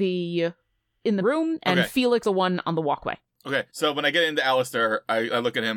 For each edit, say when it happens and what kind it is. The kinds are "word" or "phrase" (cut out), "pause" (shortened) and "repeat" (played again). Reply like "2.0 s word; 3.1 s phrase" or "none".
1.2 s word; 2.2 s word; 3.7 s pause